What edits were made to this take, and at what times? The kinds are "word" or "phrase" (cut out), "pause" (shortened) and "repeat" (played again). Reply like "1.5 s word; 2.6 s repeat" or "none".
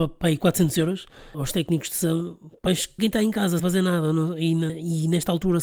1.3 s word; 2.7 s word; 3.0 s phrase; 3.6 s word; 4.7 s word